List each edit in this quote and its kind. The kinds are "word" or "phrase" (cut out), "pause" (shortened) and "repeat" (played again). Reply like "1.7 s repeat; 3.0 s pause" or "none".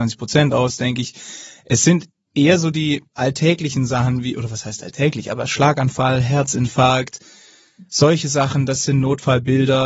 3.1 s pause